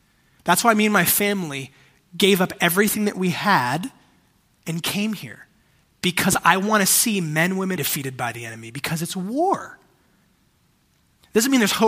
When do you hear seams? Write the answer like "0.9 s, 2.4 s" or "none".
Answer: 7.8 s